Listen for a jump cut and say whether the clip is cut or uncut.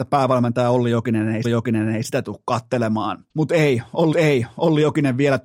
cut